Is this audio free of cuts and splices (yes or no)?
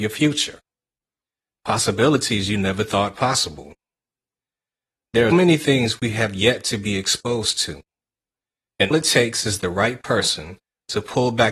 no